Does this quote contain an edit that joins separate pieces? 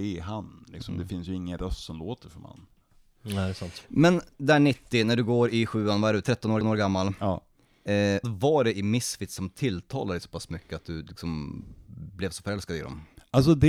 yes; 3 cuts; at 4.3 s, 6.6 s, 8.2 s

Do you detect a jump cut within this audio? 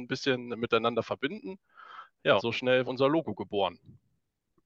yes; 2 cuts; at 2.4 s, 2.9 s

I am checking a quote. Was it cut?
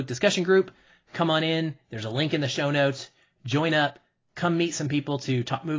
no; 0 cuts

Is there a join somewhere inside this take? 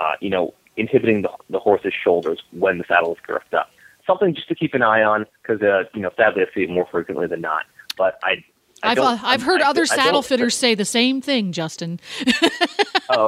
no; 0 cuts

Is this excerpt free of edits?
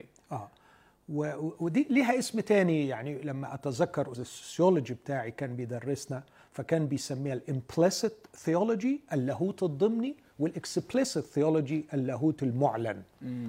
no; 1 cut; at 4.1 s

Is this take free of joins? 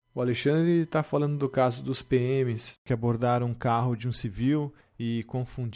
yes; 0 cuts

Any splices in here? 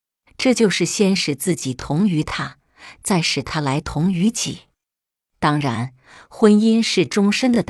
no; 0 cuts

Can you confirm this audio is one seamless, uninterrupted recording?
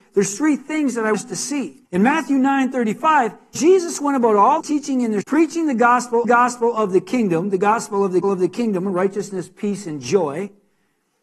no; 7 cuts; at 1.1 s, 1.8 s, 3.5 s, 4.6 s, 5.2 s, 6.2 s, 8.2 s

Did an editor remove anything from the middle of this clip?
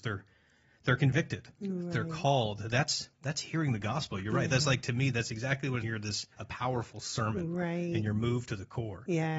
yes; 3 cuts; at 3.1 s, 5.8 s, 6.3 s

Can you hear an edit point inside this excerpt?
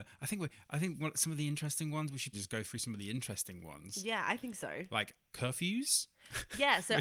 yes; 1 cut; at 2.3 s

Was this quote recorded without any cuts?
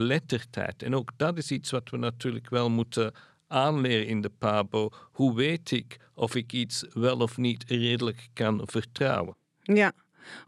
yes; 0 cuts

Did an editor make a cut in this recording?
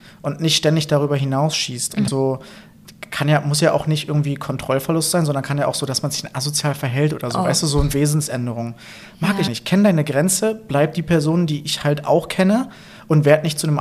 yes; 2 cuts; at 2.1 s, 9.5 s

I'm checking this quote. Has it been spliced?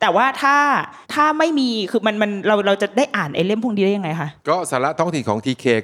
yes; 2 cuts; at 1.0 s, 4.4 s

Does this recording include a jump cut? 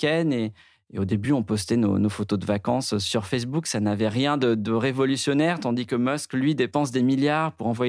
no; 0 cuts

